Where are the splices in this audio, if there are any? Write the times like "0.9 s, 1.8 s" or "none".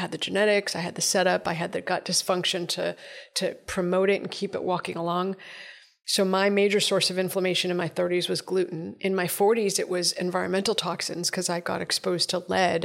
none